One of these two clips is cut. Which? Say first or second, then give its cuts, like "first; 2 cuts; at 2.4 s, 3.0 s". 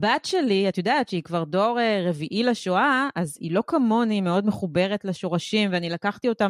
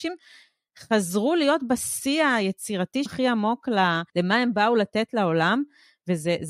second; 2 cuts; at 3.1 s, 4.1 s